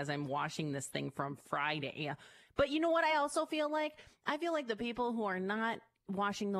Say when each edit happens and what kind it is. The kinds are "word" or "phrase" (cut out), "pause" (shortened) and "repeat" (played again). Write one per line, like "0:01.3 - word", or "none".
none